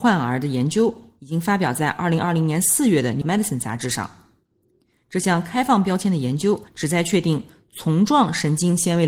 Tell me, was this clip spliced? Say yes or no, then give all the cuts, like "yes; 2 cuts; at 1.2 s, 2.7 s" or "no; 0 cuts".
yes; 2 cuts; at 3.2 s, 6.7 s